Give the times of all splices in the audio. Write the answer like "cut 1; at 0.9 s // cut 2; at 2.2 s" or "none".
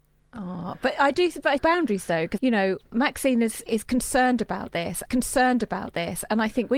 cut 1; at 1.6 s // cut 2; at 2.4 s // cut 3; at 3.7 s // cut 4; at 5.1 s